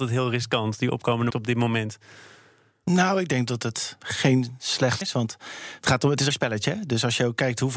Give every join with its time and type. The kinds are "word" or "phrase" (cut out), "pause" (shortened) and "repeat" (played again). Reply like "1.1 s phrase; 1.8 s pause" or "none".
1.3 s word; 4.0 s pause; 5.0 s word; 6.3 s word